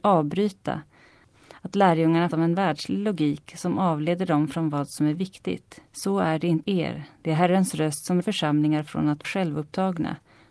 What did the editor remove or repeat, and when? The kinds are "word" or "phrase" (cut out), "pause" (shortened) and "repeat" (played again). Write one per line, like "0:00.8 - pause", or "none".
0:02.3 - word
0:05.9 - pause
0:06.6 - word
0:08.2 - word
0:09.2 - word